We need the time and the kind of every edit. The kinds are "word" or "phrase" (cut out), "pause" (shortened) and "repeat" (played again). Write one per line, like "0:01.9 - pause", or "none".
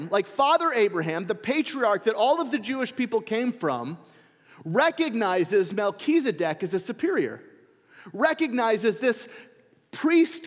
none